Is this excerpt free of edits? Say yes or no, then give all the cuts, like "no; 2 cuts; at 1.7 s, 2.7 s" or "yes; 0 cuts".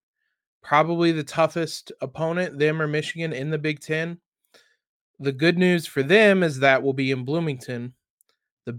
yes; 0 cuts